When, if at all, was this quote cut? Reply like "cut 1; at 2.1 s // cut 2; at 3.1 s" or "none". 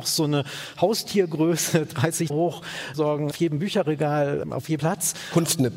cut 1; at 2.3 s // cut 2; at 2.9 s // cut 3; at 3.3 s // cut 4; at 4.4 s // cut 5; at 4.8 s